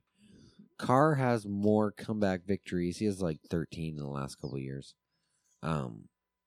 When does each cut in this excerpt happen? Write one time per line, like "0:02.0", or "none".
none